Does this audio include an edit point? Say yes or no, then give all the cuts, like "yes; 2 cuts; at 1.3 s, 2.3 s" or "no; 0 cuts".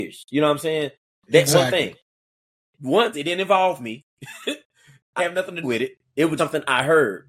yes; 4 cuts; at 3.1 s, 5.2 s, 5.6 s, 6.4 s